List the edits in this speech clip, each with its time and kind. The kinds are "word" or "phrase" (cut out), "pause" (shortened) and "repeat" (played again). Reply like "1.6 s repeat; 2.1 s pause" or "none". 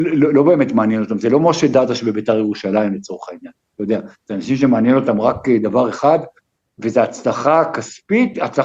none